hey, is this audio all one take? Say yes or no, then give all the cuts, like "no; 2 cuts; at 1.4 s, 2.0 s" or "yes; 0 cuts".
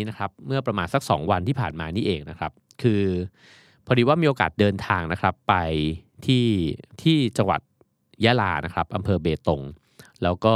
no; 1 cut; at 6.9 s